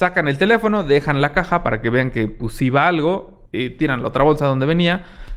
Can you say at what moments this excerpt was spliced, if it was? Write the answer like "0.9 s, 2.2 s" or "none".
3.5 s